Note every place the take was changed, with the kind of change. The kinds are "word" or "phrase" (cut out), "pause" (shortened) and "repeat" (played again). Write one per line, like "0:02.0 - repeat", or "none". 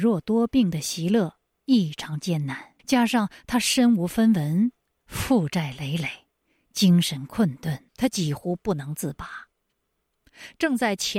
0:02.8 - pause
0:07.9 - pause